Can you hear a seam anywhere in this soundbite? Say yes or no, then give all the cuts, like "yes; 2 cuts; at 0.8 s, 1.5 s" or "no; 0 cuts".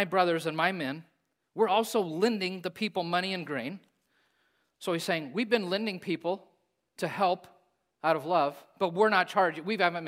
no; 0 cuts